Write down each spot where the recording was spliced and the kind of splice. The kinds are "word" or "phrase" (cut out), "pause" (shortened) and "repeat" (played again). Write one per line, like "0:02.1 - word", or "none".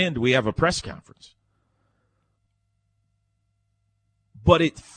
none